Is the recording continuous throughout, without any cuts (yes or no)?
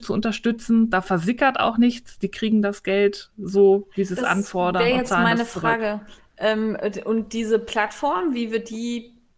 yes